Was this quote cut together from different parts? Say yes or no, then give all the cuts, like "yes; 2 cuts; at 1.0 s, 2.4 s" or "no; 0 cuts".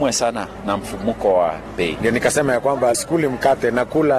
yes; 1 cut; at 2.9 s